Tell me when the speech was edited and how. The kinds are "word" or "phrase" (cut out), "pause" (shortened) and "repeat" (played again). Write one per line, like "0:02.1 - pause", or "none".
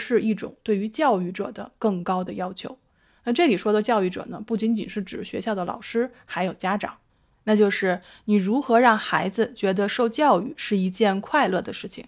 none